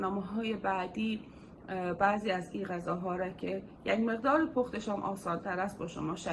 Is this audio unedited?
yes; 0 cuts

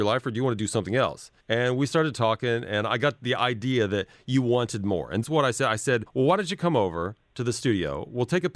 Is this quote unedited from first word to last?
no; 3 cuts; at 1.4 s, 5.2 s, 6.1 s

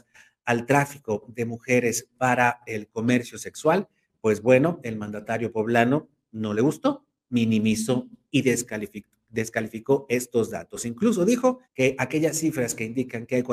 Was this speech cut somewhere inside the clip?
yes; 1 cut; at 11.6 s

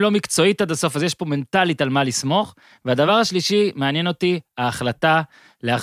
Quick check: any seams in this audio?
no; 0 cuts

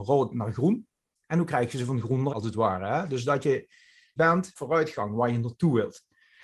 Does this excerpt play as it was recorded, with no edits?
no; 3 cuts; at 2.3 s, 4.2 s, 4.6 s

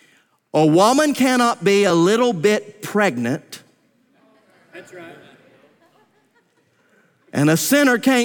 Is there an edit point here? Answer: no; 0 cuts

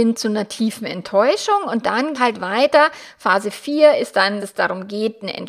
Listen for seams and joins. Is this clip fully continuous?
no; 2 cuts; at 2.1 s, 4.4 s

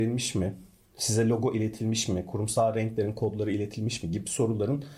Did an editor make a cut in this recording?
no; 0 cuts

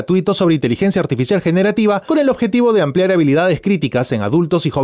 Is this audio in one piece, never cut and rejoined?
yes; 0 cuts

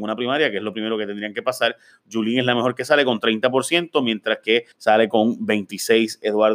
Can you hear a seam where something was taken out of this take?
yes; 1 cut; at 4.7 s

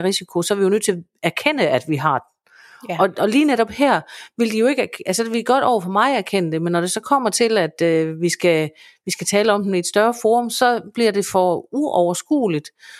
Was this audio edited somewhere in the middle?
no; 0 cuts

